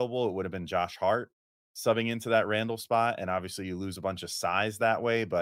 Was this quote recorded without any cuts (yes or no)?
yes